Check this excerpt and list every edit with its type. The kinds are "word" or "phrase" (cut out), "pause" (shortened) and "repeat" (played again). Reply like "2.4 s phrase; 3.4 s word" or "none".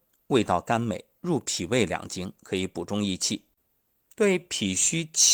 none